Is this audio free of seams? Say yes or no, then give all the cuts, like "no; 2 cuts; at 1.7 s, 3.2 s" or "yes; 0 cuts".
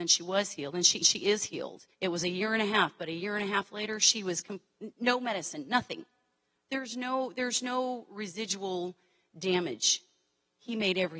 no; 2 cuts; at 1.0 s, 1.9 s